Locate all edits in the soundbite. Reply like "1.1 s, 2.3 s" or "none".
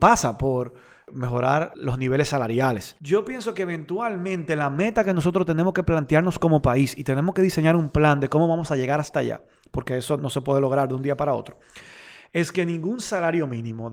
10.2 s